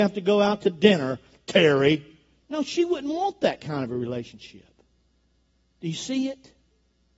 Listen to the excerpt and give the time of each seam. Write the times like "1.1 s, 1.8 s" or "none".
2.4 s